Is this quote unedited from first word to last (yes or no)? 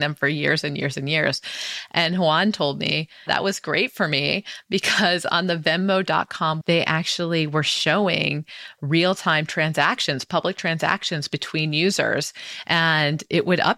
no